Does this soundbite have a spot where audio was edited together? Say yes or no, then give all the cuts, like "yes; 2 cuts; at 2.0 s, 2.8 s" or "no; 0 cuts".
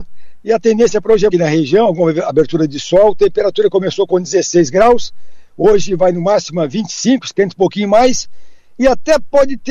yes; 1 cut; at 1.3 s